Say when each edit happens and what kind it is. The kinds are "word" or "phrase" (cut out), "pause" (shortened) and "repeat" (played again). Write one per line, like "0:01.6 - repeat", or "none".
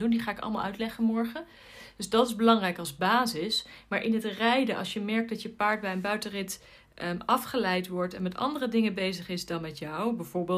none